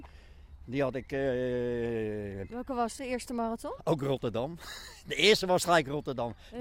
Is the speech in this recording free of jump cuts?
no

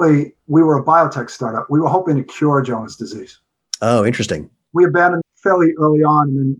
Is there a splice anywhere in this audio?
yes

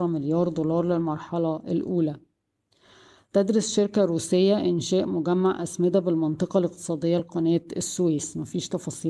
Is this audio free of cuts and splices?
yes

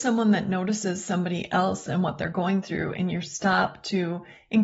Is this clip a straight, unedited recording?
yes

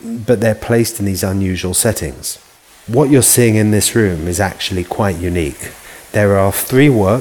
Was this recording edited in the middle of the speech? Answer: no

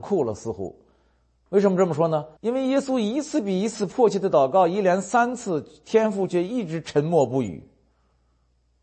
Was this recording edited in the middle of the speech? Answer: yes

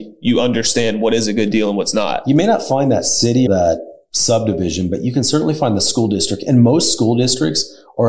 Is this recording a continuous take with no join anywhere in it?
no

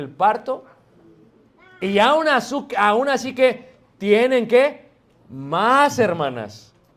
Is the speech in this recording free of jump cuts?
yes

